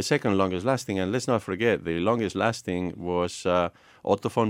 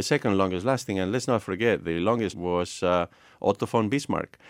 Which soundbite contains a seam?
second; 1 cut; at 2.3 s

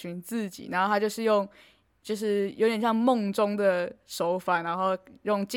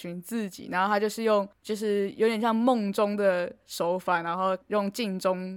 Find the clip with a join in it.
second; 2 cuts; at 1.5 s, 4.6 s

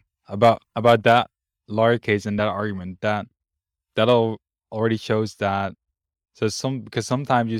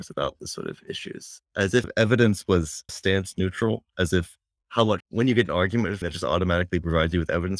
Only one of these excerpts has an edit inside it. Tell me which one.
second; 4 cuts; at 1.8 s, 2.9 s, 5.0 s, 6.0 s

